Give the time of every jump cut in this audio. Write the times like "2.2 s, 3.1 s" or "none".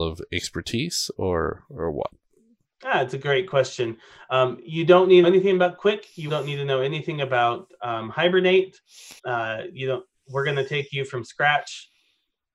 5.2 s, 6.3 s, 9.2 s